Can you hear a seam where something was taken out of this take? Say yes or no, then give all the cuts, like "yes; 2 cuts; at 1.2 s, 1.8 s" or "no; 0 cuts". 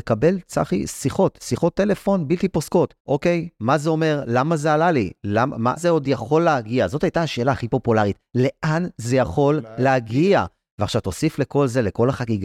yes; 2 cuts; at 3.0 s, 5.8 s